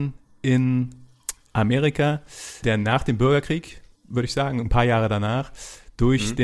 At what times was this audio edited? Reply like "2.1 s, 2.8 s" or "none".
2.6 s